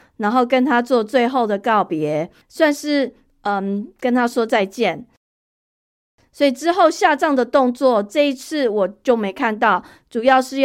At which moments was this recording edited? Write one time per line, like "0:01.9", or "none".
0:02.4